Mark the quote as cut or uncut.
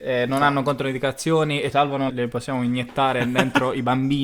cut